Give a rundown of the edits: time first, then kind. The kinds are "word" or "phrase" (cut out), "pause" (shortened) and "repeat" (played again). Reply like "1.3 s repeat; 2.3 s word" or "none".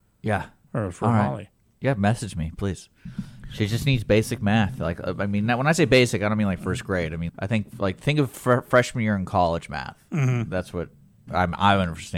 7.3 s word